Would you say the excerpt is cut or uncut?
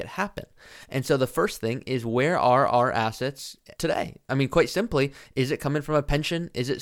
cut